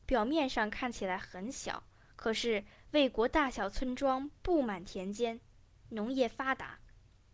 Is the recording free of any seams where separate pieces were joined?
yes; 0 cuts

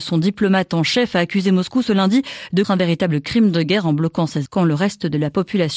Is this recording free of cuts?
no; 2 cuts; at 2.6 s, 4.4 s

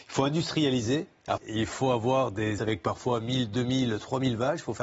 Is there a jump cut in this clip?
yes; 2 cuts; at 1.4 s, 2.6 s

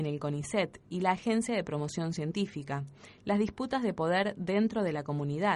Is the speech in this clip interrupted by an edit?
no; 0 cuts

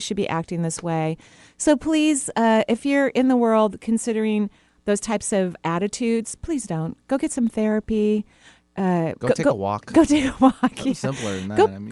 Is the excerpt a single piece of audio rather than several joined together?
no; 1 cut; at 9.2 s

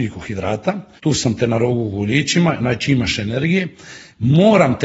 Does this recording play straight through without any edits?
no; 1 cut; at 1.0 s

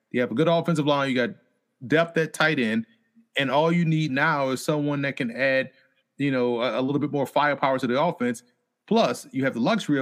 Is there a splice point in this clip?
no; 0 cuts

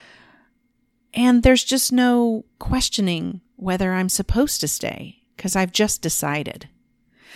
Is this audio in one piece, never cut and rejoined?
yes; 0 cuts

